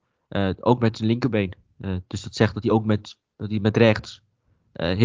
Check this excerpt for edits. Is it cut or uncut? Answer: uncut